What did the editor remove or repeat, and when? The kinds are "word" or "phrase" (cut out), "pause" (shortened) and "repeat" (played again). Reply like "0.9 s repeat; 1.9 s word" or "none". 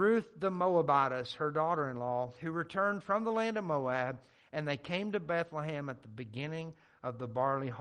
none